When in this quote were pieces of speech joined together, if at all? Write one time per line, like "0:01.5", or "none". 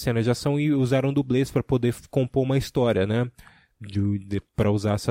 none